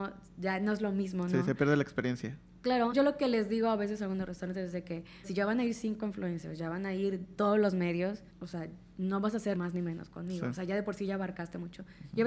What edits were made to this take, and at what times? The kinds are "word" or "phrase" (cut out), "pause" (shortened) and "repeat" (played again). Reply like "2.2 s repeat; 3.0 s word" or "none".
2.9 s word; 5.2 s word; 8.3 s pause; 9.5 s word